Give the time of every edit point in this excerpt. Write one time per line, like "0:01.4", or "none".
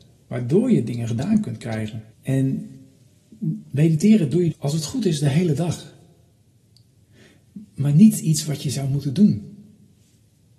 0:02.1
0:04.5